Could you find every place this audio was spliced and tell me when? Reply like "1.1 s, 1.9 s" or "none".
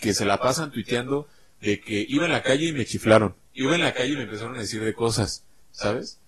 none